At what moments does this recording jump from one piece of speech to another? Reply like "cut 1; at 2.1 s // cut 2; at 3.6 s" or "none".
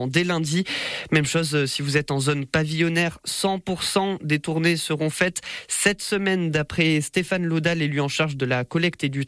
none